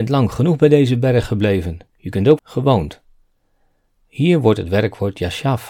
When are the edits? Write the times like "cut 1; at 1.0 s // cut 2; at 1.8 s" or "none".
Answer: cut 1; at 1.9 s // cut 2; at 2.4 s